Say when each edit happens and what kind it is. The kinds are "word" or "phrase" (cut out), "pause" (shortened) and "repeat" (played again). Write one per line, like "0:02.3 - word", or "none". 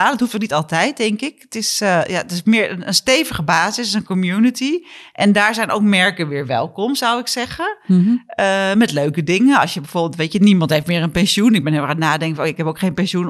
none